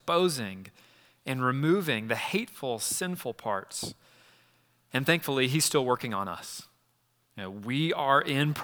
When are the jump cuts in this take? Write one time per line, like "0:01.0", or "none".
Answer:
none